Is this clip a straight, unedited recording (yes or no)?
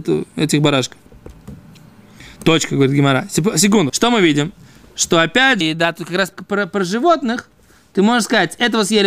no